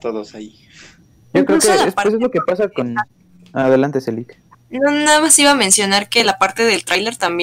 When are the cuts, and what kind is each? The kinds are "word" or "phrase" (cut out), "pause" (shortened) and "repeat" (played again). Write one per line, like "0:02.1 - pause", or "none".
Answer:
0:03.2 - pause
0:04.5 - pause